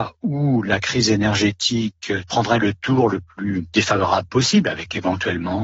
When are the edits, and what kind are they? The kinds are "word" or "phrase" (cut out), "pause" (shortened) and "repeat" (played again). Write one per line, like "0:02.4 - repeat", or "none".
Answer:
none